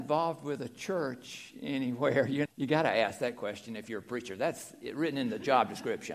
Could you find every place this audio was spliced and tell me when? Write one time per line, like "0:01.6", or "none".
0:02.5